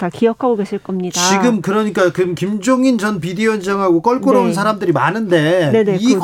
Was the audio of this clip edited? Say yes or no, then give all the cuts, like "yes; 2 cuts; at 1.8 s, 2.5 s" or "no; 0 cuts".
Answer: no; 0 cuts